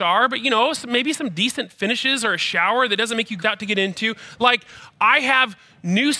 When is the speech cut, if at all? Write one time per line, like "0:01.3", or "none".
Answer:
0:03.4